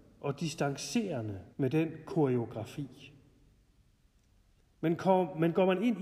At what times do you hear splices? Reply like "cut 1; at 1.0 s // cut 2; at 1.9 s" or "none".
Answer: cut 1; at 1.5 s